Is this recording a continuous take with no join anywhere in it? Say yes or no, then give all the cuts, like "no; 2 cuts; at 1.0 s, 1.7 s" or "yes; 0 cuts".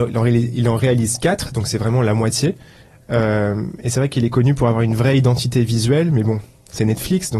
yes; 0 cuts